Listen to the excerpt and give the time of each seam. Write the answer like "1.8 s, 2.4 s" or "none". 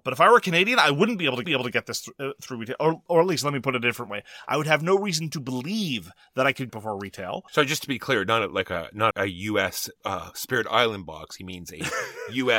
1.4 s, 6.7 s, 7.5 s, 9.1 s, 10.0 s